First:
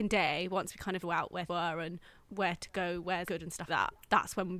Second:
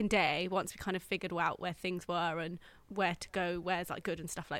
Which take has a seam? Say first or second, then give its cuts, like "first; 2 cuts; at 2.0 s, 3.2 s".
first; 4 cuts; at 1.0 s, 1.5 s, 3.3 s, 3.7 s